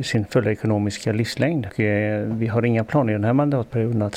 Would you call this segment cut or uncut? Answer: cut